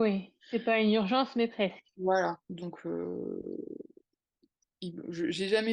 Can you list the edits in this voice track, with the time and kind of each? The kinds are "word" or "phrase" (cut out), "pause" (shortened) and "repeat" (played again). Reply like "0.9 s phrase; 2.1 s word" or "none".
1.9 s pause